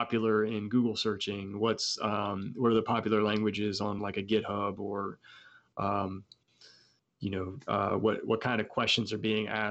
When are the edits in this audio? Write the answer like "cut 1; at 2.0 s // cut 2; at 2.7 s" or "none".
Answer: none